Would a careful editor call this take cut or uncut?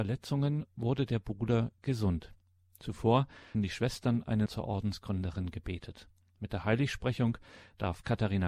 cut